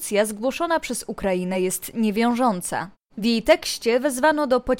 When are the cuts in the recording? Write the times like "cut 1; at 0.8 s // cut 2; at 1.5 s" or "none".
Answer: none